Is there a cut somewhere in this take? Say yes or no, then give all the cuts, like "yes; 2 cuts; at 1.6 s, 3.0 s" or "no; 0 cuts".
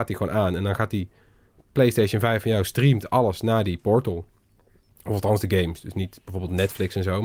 no; 0 cuts